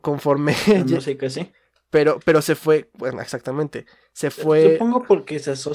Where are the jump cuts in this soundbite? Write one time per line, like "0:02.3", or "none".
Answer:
none